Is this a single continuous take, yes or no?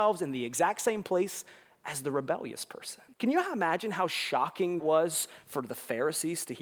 no